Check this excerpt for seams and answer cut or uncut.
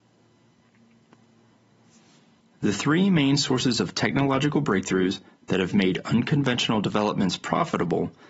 uncut